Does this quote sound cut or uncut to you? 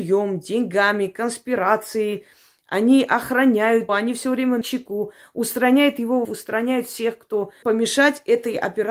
cut